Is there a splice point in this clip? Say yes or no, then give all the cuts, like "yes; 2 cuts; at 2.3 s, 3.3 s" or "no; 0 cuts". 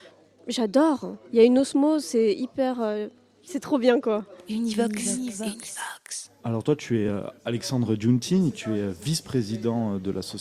no; 0 cuts